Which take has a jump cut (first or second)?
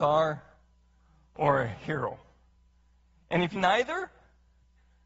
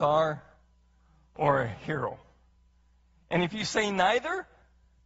first